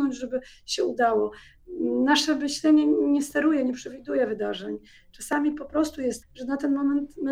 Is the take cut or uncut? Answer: cut